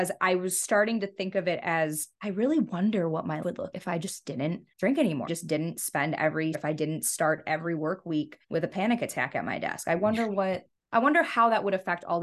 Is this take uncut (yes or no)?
no